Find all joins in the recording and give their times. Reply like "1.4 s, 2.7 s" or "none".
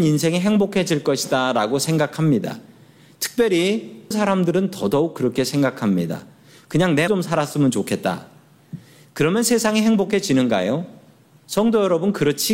4.1 s, 7.1 s